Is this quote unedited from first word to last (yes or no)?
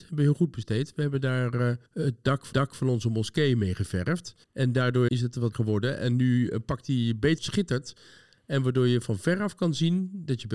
no